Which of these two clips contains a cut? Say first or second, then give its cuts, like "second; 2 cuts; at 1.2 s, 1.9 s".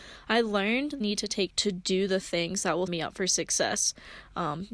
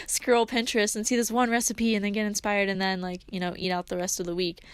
first; 3 cuts; at 1.0 s, 1.5 s, 2.9 s